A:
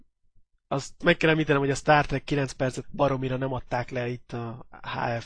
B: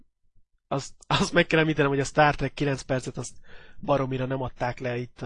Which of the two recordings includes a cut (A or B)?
A